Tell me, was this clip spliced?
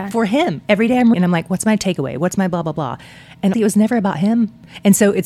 yes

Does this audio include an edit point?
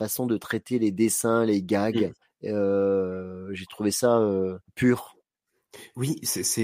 yes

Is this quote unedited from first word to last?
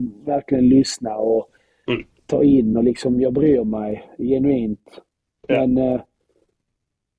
yes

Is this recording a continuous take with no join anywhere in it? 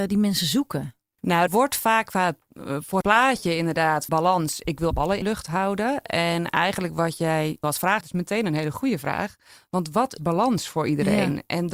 no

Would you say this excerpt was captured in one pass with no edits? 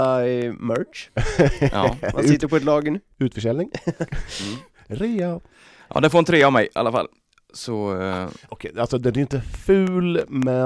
no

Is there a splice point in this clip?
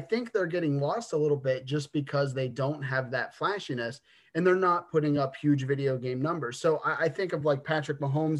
no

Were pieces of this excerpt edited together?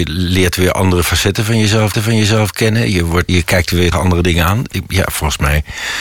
yes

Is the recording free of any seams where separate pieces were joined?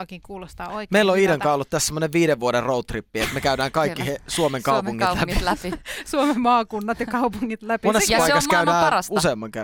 yes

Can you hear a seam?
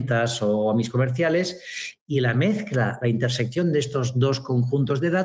no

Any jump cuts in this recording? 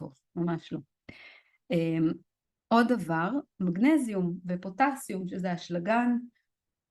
no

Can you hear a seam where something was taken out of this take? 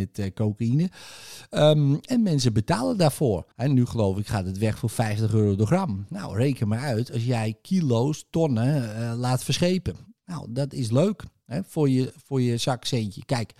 yes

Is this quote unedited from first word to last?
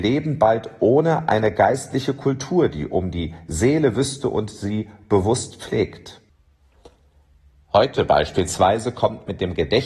yes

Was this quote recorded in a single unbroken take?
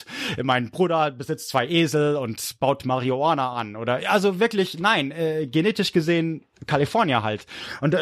yes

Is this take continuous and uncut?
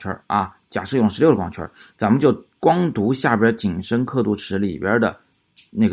yes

